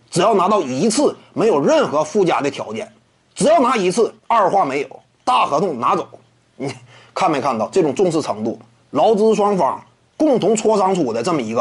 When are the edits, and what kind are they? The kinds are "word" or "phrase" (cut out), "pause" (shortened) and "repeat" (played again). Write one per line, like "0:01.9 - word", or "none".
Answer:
0:04.2 - pause